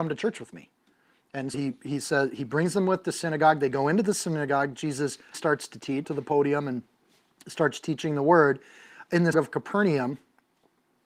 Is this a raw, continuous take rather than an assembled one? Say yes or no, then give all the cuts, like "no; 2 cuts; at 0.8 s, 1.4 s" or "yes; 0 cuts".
no; 4 cuts; at 1.5 s, 5.3 s, 6.0 s, 9.3 s